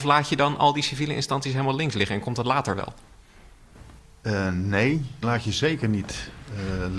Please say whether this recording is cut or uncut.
cut